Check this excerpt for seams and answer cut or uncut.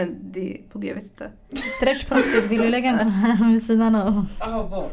cut